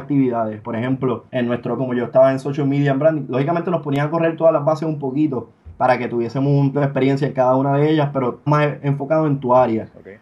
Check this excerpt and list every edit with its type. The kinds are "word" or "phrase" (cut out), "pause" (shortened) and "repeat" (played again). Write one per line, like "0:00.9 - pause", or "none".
0:01.3 - pause
0:01.8 - word
0:06.7 - word
0:08.5 - word